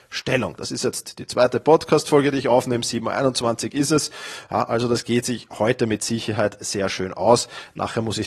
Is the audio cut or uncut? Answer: uncut